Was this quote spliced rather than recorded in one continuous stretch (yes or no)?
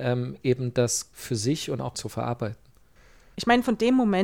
yes